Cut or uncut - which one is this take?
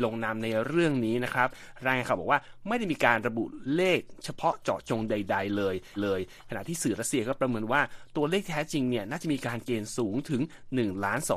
cut